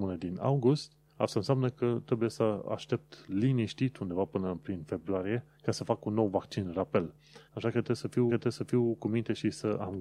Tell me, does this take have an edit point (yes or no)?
yes